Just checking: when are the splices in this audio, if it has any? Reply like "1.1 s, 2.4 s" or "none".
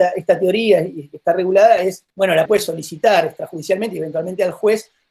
2.1 s, 2.5 s